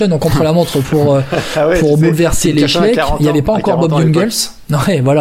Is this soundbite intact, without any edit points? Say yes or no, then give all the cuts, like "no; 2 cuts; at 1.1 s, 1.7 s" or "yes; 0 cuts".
yes; 0 cuts